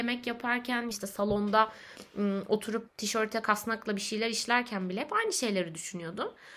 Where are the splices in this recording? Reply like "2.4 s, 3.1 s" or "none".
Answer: 0.9 s, 2.9 s